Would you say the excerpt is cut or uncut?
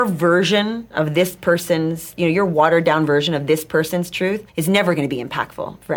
cut